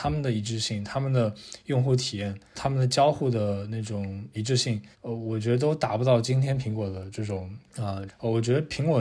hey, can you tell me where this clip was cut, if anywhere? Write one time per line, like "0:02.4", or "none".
0:02.5
0:04.9
0:07.7
0:08.1